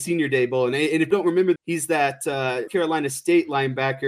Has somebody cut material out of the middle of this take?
yes; 3 cuts; at 1.1 s, 1.6 s, 2.7 s

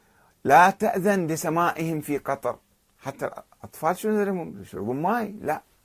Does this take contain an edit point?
no; 0 cuts

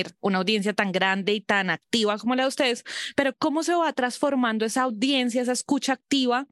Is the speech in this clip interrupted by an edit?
no; 0 cuts

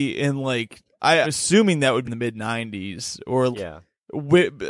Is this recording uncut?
no; 3 cuts; at 1.2 s, 2.0 s, 3.5 s

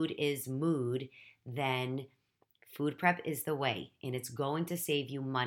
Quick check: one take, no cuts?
yes; 0 cuts

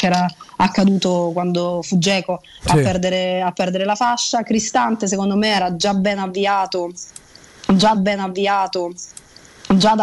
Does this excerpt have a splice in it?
yes; 1 cut; at 7.9 s

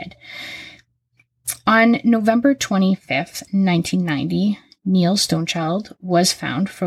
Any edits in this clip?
no; 0 cuts

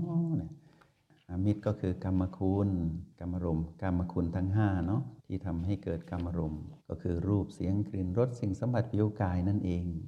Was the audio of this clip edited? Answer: yes; 3 cuts; at 3.1 s, 5.2 s, 6.8 s

